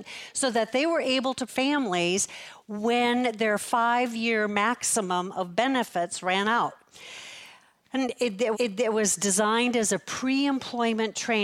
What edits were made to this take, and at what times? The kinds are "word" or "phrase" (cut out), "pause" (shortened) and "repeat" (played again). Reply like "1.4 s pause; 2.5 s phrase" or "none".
1.5 s phrase; 8.5 s repeat